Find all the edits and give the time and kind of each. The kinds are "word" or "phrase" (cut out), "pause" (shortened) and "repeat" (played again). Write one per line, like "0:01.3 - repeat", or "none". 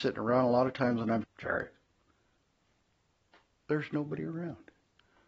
0:01.2 - word